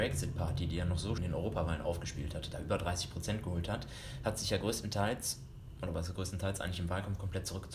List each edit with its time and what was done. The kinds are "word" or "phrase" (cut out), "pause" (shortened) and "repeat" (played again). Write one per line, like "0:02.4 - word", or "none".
0:01.2 - word